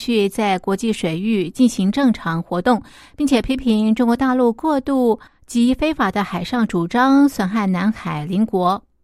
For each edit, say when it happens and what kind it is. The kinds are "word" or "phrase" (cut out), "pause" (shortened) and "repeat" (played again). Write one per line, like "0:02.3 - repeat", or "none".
0:05.3 - pause